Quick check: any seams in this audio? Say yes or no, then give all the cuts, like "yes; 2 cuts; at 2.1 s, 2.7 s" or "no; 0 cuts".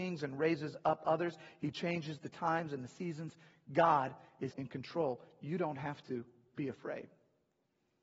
yes; 1 cut; at 4.5 s